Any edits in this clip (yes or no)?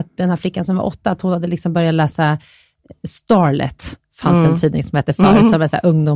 no